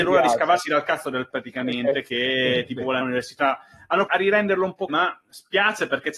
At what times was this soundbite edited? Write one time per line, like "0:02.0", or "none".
0:01.3
0:03.0
0:04.1
0:04.9